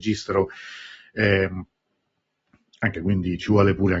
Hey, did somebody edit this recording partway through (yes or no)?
yes